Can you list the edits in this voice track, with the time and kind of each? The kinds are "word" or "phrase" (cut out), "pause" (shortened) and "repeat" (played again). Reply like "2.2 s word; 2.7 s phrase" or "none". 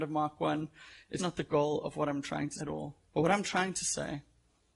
1.2 s word; 2.6 s word; 3.1 s pause

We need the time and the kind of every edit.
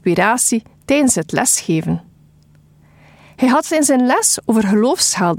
none

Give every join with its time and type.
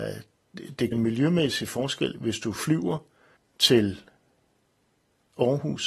0.9 s word; 3.4 s pause

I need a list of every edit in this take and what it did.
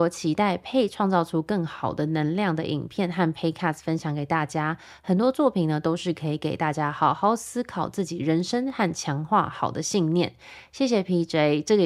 none

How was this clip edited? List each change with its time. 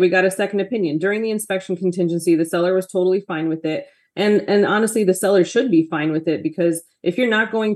none

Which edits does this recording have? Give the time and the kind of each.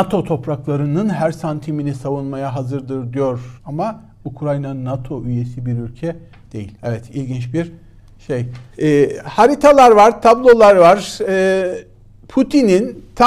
3.6 s pause; 6.8 s pause; 8.7 s pause

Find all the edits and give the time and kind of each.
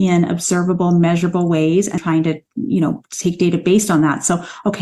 2.0 s word

